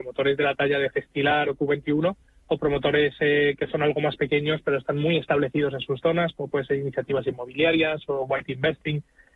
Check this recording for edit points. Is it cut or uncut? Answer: uncut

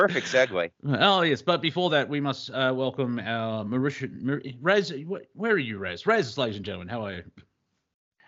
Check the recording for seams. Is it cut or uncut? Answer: uncut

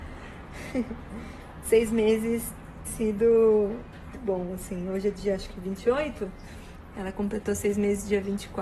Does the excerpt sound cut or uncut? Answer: cut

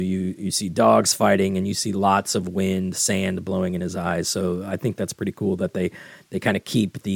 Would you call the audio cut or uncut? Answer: uncut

